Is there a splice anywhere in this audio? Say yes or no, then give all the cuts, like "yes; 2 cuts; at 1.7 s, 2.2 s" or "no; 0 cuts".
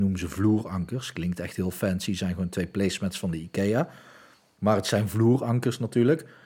no; 0 cuts